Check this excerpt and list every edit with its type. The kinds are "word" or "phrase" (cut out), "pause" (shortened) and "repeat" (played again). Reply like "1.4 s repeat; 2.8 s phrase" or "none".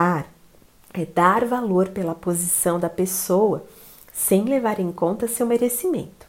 none